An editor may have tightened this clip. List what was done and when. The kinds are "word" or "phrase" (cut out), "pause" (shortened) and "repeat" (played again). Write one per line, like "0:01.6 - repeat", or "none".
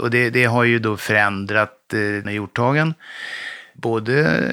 0:02.2 - word